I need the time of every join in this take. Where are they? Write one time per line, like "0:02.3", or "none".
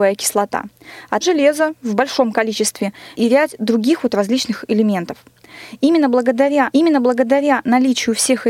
0:01.2
0:03.1
0:06.7